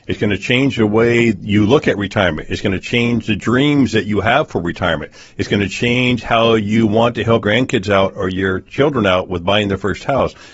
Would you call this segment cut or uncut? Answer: cut